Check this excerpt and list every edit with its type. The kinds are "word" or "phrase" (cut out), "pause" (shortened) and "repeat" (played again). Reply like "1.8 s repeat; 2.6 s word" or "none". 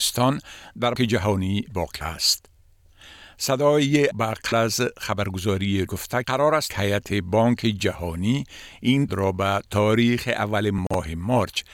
0.9 s word; 1.7 s word; 2.0 s word; 4.1 s word; 4.5 s word; 5.9 s word; 6.2 s word; 6.7 s word; 9.1 s word